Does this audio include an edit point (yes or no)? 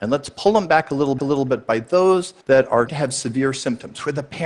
yes